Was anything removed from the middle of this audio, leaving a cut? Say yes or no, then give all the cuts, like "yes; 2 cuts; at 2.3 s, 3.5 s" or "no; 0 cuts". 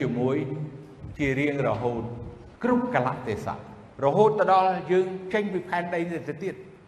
yes; 2 cuts; at 2.6 s, 3.9 s